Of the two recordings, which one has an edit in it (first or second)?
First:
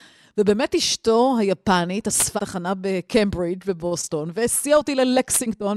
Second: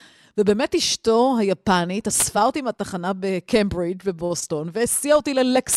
first